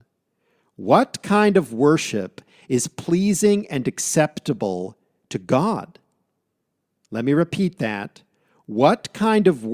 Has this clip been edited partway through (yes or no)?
no